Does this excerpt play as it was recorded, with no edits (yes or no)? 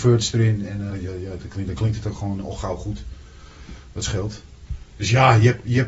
no